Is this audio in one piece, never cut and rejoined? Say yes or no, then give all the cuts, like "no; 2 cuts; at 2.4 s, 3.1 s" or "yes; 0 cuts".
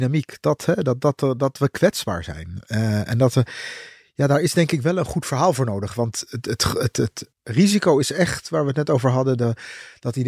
no; 1 cut; at 7.3 s